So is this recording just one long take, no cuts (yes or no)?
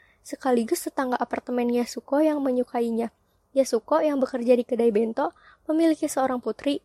yes